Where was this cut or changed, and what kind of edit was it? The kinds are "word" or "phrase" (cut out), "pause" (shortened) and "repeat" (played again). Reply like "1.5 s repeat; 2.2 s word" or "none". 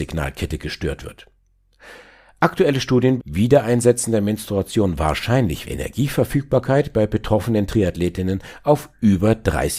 3.2 s phrase; 5.6 s phrase